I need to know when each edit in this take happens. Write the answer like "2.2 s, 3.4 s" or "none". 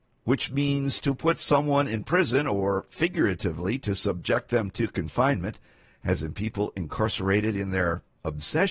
none

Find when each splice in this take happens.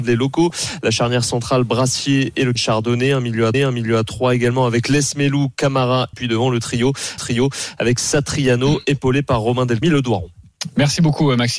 2.6 s, 3.5 s, 6.1 s, 7.2 s, 9.8 s

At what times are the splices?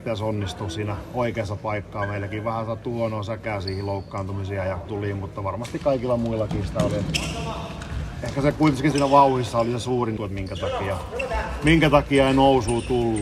4.9 s, 8.9 s, 10.2 s

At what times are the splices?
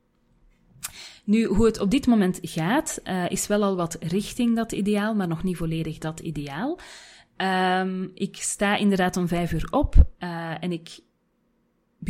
none

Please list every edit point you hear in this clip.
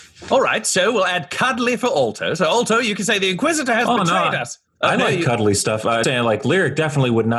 6.0 s

